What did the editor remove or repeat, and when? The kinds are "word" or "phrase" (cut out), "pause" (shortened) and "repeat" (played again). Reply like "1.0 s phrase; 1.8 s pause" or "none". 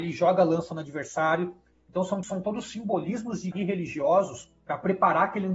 2.2 s word; 3.5 s word